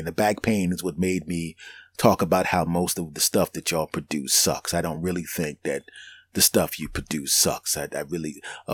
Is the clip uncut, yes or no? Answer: yes